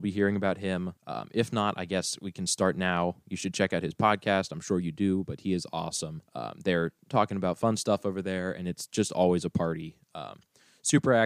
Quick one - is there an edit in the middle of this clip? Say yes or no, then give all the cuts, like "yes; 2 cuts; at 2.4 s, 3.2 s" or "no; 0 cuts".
yes; 2 cuts; at 1.0 s, 6.3 s